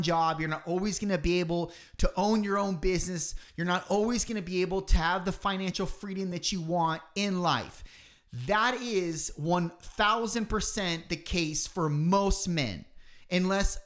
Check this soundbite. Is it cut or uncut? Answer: uncut